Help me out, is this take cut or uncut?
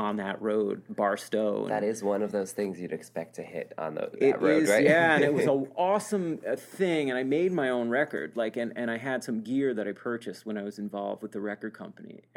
uncut